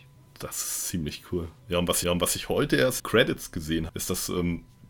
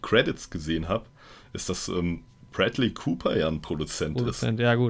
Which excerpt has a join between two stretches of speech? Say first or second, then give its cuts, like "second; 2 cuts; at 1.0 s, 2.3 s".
first; 3 cuts; at 2.0 s, 3.0 s, 3.9 s